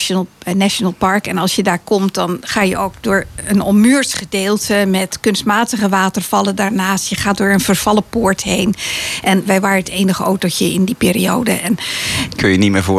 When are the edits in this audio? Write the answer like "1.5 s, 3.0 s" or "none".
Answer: 9.4 s